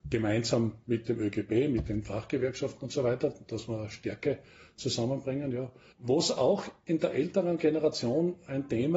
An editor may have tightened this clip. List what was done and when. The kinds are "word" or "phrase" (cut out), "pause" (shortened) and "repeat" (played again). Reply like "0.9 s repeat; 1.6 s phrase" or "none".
none